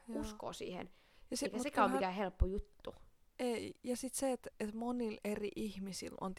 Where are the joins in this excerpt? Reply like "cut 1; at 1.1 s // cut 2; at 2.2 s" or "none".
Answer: cut 1; at 4.5 s